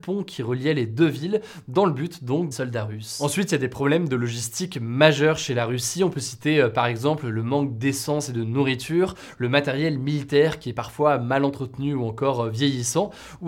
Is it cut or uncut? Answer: cut